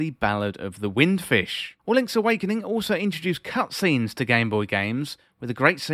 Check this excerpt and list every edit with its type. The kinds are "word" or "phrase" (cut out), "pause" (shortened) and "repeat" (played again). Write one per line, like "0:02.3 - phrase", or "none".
0:01.8 - pause